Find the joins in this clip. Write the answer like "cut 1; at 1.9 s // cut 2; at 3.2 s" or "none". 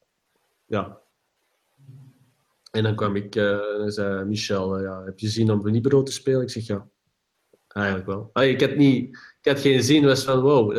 none